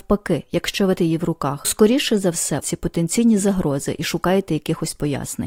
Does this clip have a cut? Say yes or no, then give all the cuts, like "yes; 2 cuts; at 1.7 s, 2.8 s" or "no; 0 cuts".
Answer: yes; 3 cuts; at 1.0 s, 1.6 s, 2.6 s